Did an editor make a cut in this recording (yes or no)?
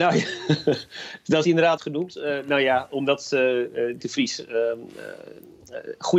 yes